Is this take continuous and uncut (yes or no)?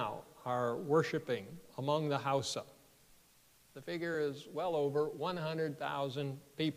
yes